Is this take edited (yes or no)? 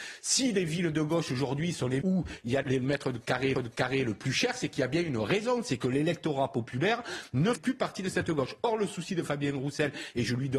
yes